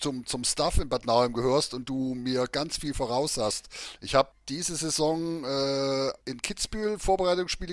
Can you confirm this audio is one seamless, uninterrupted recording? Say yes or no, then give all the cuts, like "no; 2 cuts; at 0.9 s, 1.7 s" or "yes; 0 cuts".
no; 2 cuts; at 4.3 s, 6.2 s